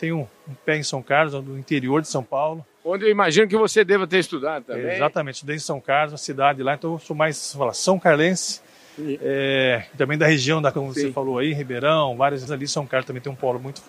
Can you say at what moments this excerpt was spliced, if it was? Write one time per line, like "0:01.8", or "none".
0:10.7
0:12.5